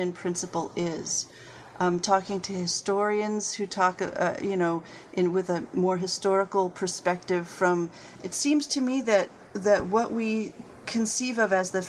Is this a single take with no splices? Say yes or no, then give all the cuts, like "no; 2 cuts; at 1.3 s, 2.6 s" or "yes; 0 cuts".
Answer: yes; 0 cuts